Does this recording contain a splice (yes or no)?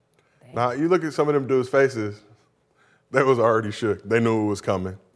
no